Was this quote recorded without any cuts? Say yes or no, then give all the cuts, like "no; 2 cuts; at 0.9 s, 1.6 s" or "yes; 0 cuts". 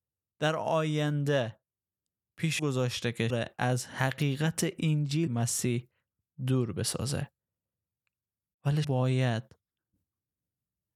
no; 4 cuts; at 2.6 s, 3.3 s, 5.3 s, 8.8 s